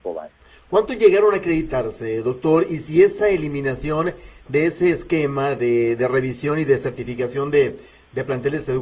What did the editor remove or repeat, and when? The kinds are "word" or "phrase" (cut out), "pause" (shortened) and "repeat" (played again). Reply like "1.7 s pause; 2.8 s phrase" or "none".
none